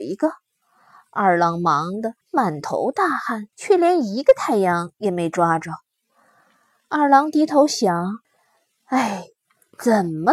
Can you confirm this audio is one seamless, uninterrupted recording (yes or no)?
no